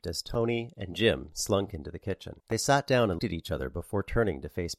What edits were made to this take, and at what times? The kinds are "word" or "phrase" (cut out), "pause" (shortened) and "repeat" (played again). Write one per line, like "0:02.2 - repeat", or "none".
0:02.4 - pause
0:03.2 - word